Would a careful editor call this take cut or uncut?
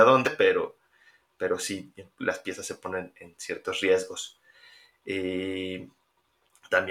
uncut